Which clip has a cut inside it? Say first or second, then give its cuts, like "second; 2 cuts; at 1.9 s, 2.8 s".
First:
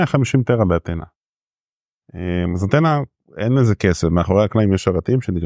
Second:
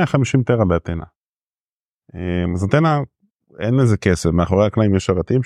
first; 1 cut; at 3.2 s